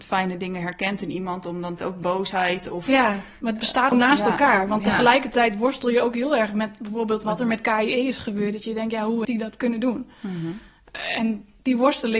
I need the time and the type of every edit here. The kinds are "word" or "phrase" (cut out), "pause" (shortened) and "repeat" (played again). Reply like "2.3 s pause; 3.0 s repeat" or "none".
1.8 s word; 3.9 s phrase; 9.2 s word